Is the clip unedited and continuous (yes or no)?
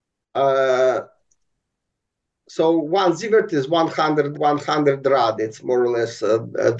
no